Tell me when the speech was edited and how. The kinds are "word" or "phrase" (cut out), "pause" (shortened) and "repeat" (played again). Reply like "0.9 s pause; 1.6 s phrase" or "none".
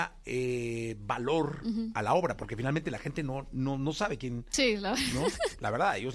none